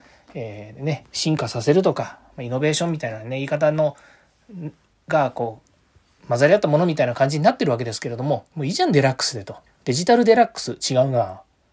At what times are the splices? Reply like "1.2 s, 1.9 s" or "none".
9.7 s